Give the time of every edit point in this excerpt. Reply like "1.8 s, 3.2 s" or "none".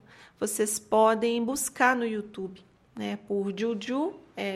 none